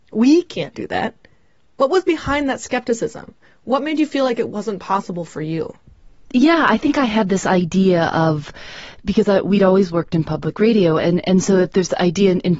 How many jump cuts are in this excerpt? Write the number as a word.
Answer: zero